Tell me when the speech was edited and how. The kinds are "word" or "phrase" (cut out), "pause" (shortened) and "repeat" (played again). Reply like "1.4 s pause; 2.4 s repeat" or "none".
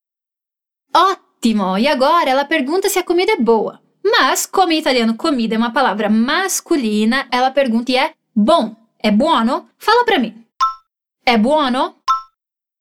7.3 s word; 7.9 s word; 9.7 s pause; 10.9 s pause